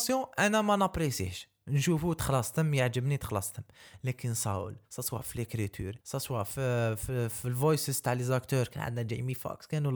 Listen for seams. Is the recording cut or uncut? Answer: cut